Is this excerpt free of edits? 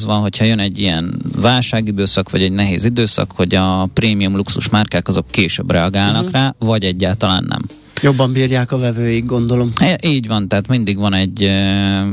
yes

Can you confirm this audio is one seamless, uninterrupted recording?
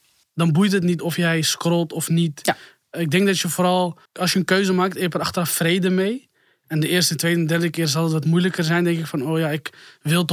no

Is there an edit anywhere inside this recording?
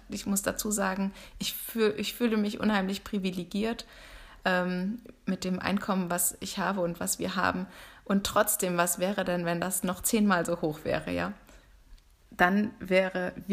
no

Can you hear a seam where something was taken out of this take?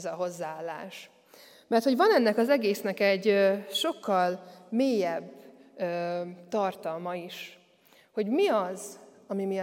no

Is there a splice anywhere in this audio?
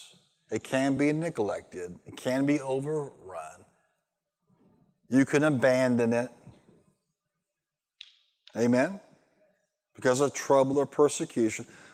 no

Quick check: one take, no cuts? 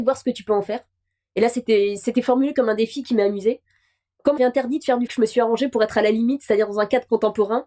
no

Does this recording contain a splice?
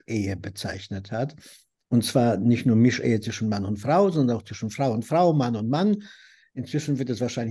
no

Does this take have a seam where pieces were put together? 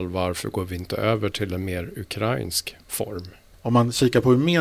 no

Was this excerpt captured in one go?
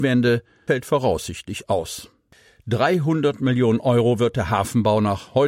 yes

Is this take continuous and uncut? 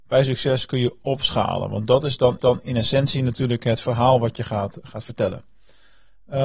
no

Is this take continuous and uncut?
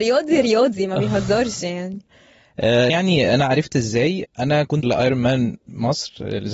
no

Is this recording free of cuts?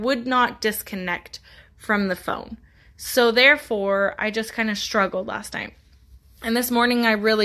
yes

